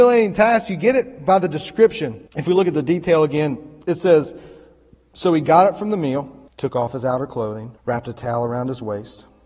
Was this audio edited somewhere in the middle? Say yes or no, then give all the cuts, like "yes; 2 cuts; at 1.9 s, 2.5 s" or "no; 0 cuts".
yes; 4 cuts; at 2.3 s, 3.8 s, 6.5 s, 7.8 s